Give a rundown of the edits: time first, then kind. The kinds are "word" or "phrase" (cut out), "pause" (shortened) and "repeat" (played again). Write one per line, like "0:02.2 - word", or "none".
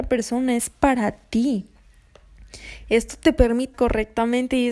0:03.7 - word